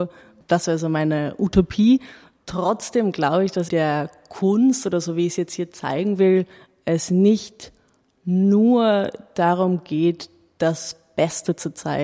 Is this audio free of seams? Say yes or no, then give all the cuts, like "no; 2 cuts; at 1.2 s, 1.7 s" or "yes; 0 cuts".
no; 1 cut; at 3.7 s